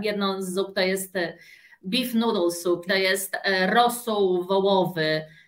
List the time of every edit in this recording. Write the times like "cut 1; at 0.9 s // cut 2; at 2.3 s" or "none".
cut 1; at 2.9 s